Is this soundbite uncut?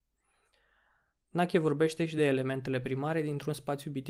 yes; 0 cuts

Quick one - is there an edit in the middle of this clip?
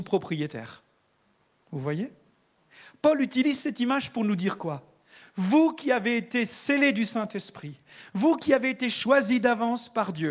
no; 0 cuts

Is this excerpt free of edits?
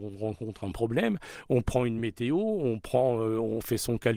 yes; 0 cuts

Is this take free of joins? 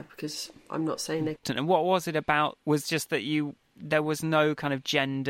no; 2 cuts; at 1.4 s, 2.6 s

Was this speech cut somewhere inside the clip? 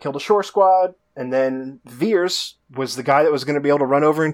yes; 2 cuts; at 1.0 s, 2.6 s

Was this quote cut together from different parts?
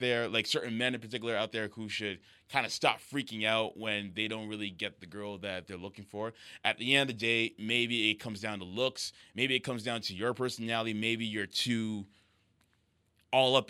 no; 0 cuts

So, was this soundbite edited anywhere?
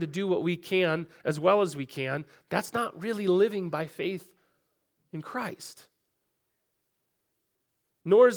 no; 0 cuts

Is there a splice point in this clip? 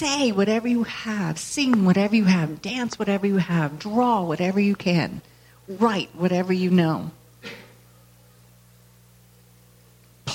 no; 0 cuts

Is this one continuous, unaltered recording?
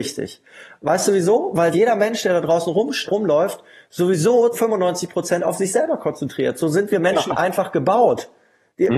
no; 3 cuts; at 1.7 s, 3.1 s, 4.5 s

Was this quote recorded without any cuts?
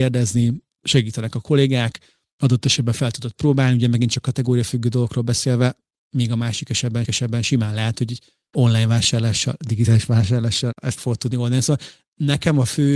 no; 2 cuts; at 7.0 s, 11.0 s

